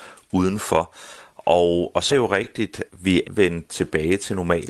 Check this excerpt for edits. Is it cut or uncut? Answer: cut